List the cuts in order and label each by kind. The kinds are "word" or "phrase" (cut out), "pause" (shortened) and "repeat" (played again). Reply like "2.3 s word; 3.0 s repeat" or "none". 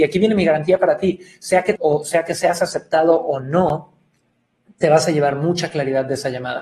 1.8 s word